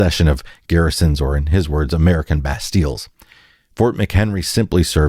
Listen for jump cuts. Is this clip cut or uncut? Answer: uncut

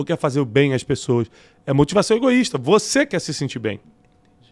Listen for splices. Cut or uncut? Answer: uncut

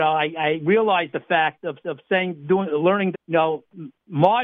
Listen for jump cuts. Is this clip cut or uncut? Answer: cut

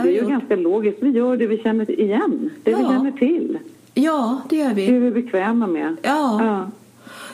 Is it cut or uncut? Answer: uncut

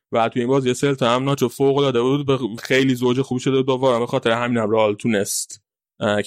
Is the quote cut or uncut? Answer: cut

